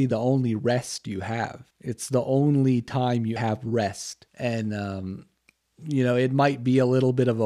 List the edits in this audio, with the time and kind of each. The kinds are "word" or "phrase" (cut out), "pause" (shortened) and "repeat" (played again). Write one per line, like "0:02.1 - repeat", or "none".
0:01.7 - pause
0:03.4 - word
0:04.3 - pause